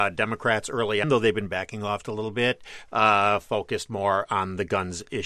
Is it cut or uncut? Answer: cut